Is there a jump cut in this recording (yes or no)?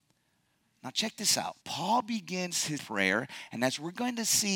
yes